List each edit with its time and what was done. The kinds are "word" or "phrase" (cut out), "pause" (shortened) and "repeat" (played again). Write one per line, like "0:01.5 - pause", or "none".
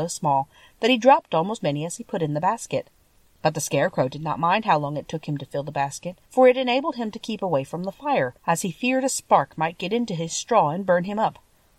0:01.6 - word
0:06.3 - pause
0:08.4 - pause

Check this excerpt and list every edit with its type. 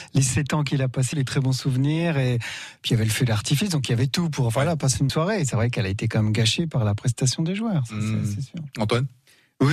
0:01.1 - phrase
0:05.1 - word

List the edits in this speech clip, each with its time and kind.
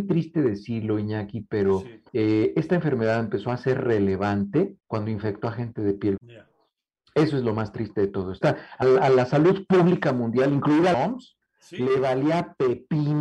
0:02.1 - pause
0:04.8 - pause
0:06.2 - word
0:08.4 - word
0:08.8 - word
0:10.9 - word

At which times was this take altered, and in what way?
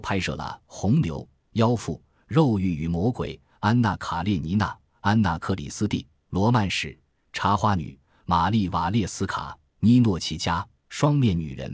none

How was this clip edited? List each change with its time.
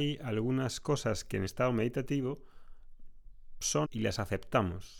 0:01.5 - word
0:03.8 - word

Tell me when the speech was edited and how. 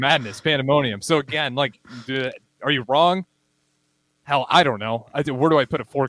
none

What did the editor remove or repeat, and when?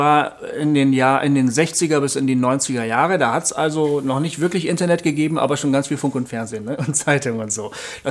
none

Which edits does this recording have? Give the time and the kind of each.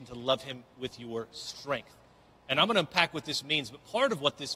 none

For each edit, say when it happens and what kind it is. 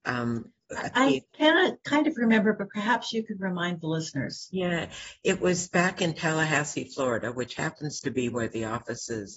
0:01.3 - pause

